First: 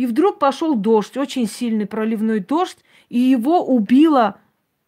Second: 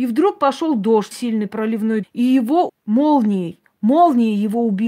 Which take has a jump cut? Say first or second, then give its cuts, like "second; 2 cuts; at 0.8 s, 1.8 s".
second; 3 cuts; at 1.1 s, 2.0 s, 2.7 s